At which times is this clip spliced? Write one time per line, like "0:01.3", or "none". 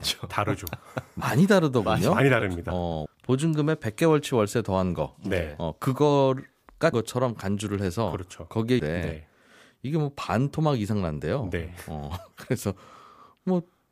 0:03.1
0:06.9
0:08.8